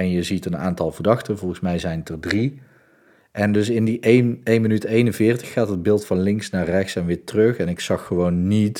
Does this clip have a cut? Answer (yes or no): no